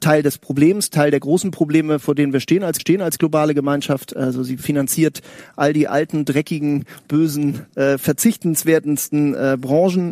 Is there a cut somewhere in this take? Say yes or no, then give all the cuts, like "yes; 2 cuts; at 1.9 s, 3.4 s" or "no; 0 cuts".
yes; 2 cuts; at 2.8 s, 7.7 s